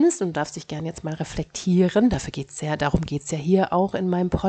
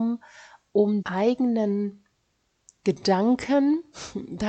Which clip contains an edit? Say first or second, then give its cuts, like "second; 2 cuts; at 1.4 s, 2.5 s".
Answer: second; 1 cut; at 1.0 s